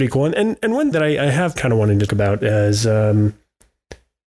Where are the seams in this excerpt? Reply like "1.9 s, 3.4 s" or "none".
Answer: 0.9 s, 1.6 s, 2.1 s